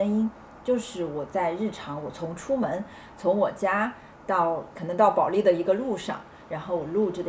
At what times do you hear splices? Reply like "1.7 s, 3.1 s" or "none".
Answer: 4.7 s